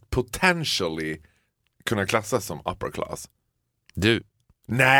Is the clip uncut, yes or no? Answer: yes